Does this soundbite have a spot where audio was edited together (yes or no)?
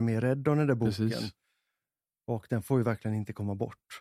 no